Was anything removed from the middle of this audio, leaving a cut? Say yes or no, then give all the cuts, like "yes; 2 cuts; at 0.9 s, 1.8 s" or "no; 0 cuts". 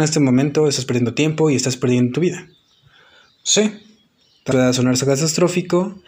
yes; 1 cut; at 4.5 s